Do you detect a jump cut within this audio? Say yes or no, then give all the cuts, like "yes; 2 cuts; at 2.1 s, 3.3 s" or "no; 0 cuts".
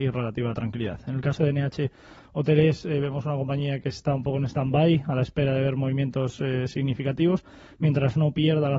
no; 0 cuts